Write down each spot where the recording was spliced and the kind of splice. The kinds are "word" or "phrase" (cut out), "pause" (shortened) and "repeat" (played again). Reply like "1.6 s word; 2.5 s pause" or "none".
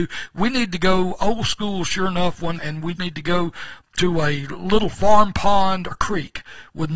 2.6 s word; 3.0 s word; 5.9 s word